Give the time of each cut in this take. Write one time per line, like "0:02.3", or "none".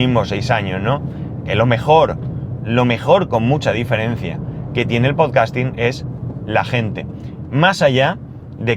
none